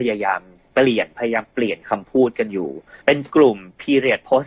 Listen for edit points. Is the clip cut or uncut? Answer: cut